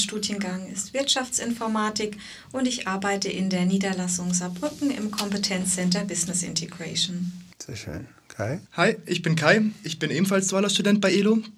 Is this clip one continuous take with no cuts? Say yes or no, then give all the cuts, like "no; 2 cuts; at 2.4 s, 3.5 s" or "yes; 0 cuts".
no; 2 cuts; at 7.5 s, 8.7 s